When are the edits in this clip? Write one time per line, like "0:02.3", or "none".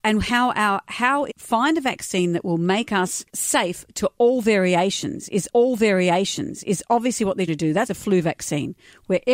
0:01.3
0:03.3
0:05.5
0:07.5
0:07.9